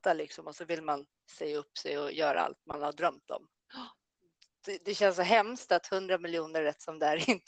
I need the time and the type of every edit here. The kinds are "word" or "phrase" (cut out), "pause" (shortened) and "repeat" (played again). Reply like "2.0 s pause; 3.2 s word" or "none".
none